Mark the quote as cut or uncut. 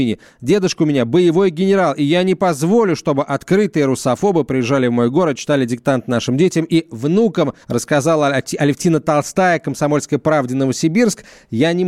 cut